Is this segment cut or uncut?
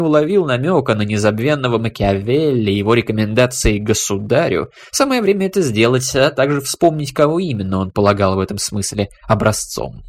uncut